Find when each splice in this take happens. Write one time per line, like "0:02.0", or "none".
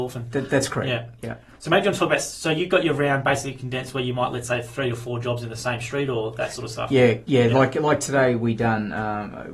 none